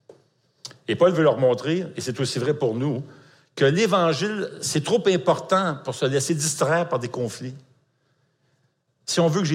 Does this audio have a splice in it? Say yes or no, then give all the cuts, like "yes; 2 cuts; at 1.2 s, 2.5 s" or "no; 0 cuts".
no; 0 cuts